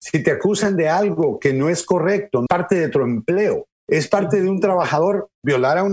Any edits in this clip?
yes; 2 cuts; at 2.5 s, 3.8 s

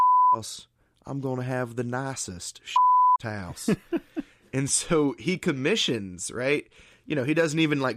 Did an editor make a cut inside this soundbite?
no; 0 cuts

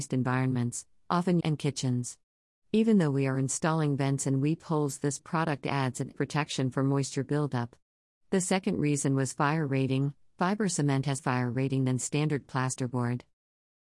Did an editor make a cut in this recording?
yes; 3 cuts; at 1.4 s, 6.1 s, 11.2 s

